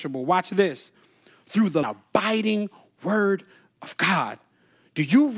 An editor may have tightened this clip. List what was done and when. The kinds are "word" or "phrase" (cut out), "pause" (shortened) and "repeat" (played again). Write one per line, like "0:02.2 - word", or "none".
0:01.8 - phrase

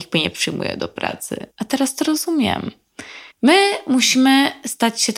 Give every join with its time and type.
0:01.5 - pause
0:03.3 - pause

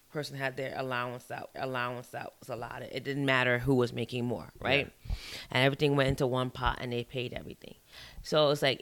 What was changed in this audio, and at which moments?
0:01.5 - repeat

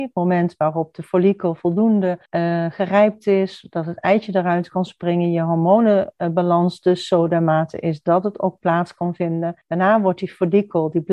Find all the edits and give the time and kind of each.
0:02.3 - pause
0:09.6 - pause

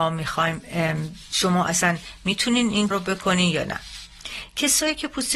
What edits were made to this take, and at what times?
0:01.3 - word
0:02.9 - word

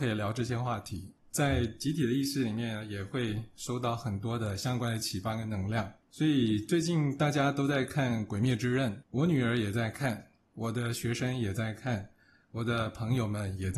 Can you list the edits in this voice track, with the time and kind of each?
none

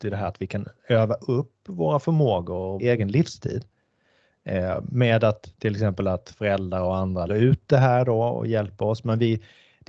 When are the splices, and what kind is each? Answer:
0:02.8 - phrase
0:07.3 - word

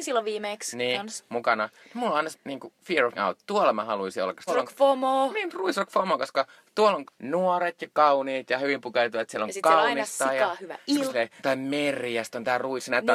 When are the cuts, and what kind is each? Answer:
0:02.3 - word
0:03.1 - word
0:04.5 - word
0:07.0 - word
0:11.1 - word
0:11.4 - word

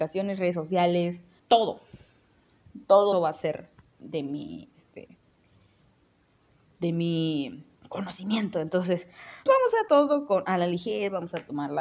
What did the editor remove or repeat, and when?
0:01.4 - pause
0:03.1 - word
0:03.7 - pause
0:04.7 - pause
0:07.7 - pause
0:09.5 - word
0:09.9 - word

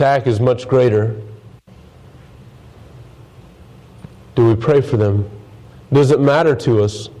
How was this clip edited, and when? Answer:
none

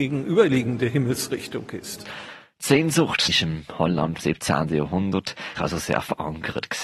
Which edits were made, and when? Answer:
0:03.3 - phrase
0:04.2 - word
0:05.6 - word

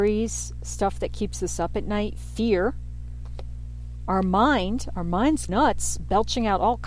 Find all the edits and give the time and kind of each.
0:05.5 - word

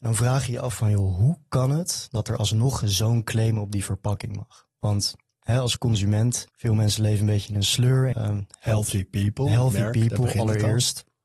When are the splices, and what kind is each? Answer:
0:06.5 - pause
0:08.1 - phrase

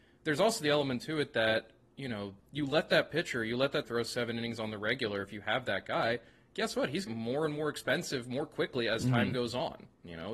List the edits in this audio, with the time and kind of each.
0:02.4 - pause
0:03.8 - word
0:07.1 - phrase

